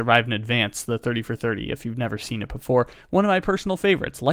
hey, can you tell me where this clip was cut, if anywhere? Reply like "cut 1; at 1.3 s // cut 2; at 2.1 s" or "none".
none